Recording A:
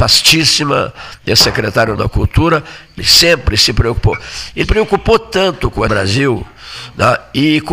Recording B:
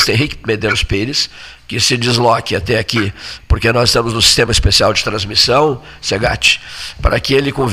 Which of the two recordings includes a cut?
A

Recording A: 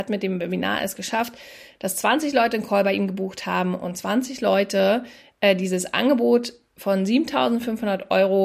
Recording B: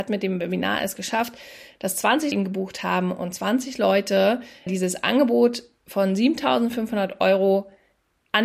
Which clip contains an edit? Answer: B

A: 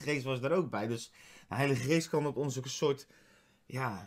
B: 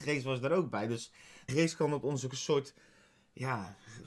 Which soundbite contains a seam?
B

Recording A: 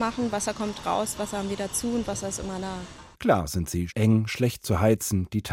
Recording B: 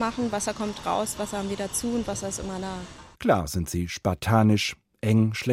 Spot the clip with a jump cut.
A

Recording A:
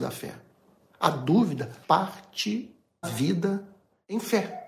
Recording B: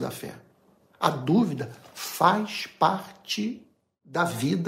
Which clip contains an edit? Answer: A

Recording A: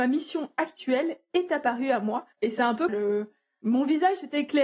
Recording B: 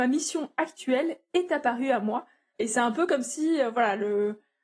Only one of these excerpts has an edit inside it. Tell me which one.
A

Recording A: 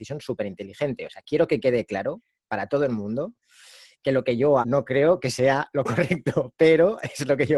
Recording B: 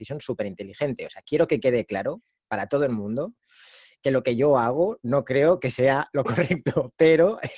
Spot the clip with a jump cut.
A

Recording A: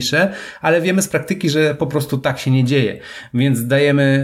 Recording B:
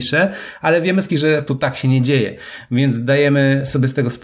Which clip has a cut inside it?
B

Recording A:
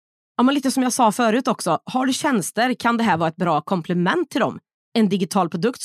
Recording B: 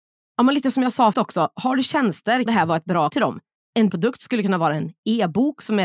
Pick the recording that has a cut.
B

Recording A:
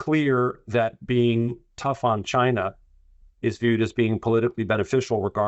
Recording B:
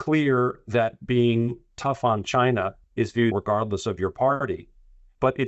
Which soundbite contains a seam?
B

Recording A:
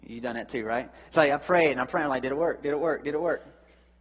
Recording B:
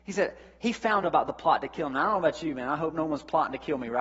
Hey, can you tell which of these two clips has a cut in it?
B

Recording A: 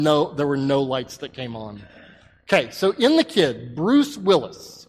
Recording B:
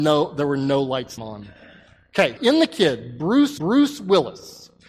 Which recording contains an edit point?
B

